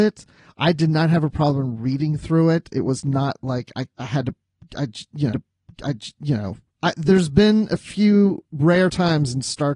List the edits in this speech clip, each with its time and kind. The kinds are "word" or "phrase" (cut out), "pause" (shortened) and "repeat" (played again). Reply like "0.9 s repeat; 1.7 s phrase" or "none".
3.9 s pause; 5.3 s repeat